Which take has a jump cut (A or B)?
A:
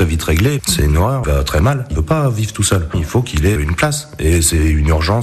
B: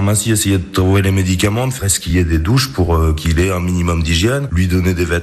A